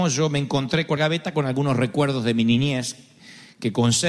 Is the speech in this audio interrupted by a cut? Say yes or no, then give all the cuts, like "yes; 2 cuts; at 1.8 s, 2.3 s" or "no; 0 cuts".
yes; 1 cut; at 1.0 s